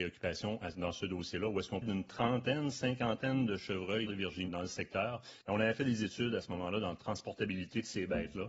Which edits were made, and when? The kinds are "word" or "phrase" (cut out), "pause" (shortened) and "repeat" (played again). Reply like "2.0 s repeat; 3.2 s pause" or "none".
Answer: 1.8 s word; 4.1 s phrase; 4.5 s word; 5.4 s pause